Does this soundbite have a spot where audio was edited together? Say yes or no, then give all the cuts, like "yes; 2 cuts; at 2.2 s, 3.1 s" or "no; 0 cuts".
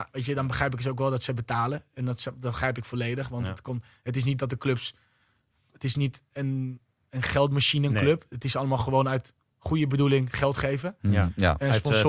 no; 0 cuts